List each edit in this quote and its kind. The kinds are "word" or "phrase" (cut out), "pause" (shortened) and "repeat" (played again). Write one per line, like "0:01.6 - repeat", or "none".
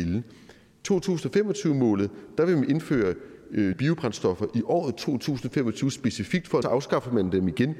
0:03.7 - word
0:06.6 - phrase